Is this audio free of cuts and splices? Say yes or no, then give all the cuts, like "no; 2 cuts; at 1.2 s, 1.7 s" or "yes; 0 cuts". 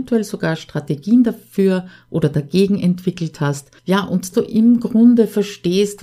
no; 2 cuts; at 3.8 s, 4.3 s